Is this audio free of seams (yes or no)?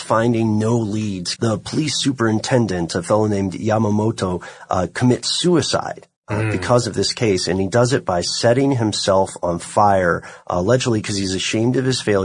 no